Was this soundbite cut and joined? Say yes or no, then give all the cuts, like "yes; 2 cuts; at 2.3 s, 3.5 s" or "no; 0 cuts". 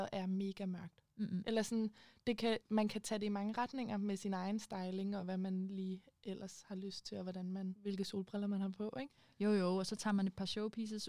no; 0 cuts